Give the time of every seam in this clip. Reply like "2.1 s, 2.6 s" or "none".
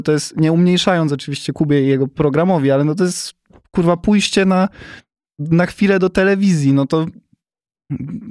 none